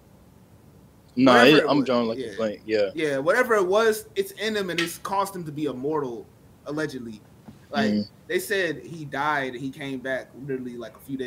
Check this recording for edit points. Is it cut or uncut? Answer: uncut